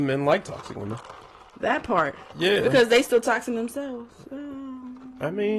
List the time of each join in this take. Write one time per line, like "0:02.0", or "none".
none